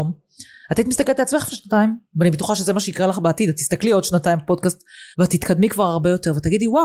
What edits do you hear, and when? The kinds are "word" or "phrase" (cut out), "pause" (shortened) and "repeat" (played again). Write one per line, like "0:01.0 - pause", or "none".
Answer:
0:05.1 - pause